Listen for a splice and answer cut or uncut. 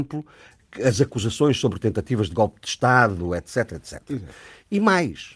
uncut